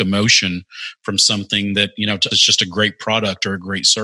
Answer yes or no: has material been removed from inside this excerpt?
yes